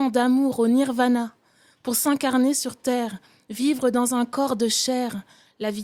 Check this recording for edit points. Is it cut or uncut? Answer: uncut